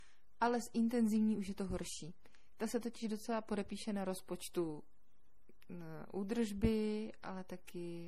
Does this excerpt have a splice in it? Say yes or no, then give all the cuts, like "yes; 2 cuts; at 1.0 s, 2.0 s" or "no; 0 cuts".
no; 0 cuts